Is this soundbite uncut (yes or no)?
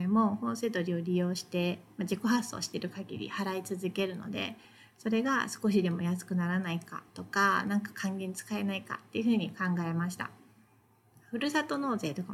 yes